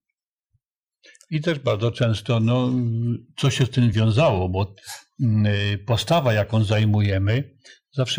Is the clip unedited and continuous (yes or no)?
yes